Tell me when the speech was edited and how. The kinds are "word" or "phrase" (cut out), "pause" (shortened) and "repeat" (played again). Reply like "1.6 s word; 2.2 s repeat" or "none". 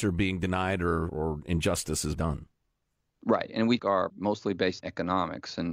1.1 s word; 2.2 s word; 3.8 s word; 4.1 s word; 4.8 s word